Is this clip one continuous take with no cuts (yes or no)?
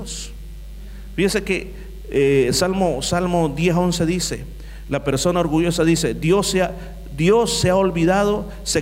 yes